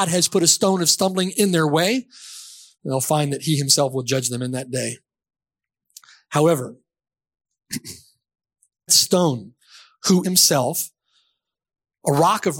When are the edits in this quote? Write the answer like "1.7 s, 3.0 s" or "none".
8.9 s, 10.2 s